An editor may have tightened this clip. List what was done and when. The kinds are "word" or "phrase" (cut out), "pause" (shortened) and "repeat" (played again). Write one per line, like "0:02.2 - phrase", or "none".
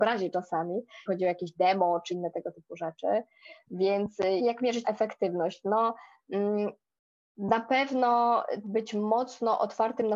0:01.1 - word
0:02.1 - word
0:04.4 - word
0:04.8 - word
0:08.6 - word